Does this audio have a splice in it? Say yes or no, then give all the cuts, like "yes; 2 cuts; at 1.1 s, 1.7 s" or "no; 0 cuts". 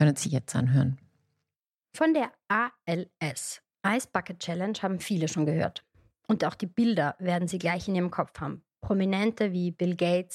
no; 0 cuts